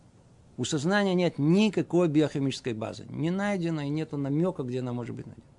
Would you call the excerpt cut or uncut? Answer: uncut